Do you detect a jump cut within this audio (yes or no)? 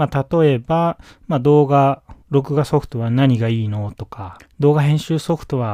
yes